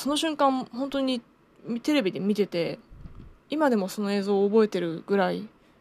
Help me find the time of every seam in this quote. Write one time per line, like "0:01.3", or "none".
0:03.4